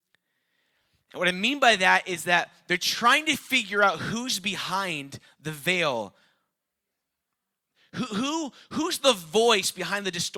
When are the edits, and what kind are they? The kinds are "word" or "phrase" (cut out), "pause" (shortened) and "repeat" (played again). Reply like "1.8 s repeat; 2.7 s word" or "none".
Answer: none